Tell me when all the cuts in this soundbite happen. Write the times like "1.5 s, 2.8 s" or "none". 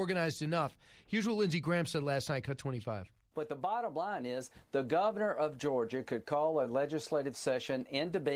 none